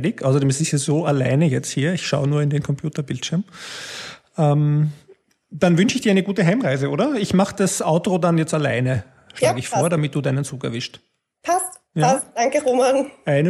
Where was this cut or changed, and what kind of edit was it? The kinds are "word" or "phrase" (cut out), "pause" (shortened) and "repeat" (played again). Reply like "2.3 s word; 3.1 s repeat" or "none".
none